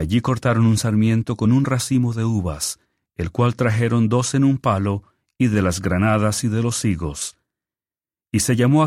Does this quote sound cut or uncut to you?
uncut